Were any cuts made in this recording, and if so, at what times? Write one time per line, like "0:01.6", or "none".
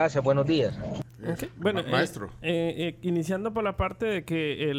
0:01.1